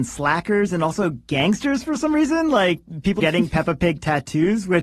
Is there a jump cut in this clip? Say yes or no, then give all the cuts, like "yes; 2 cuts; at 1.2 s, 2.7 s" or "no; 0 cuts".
yes; 1 cut; at 3.2 s